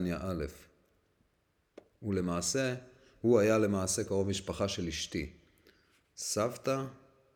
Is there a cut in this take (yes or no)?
no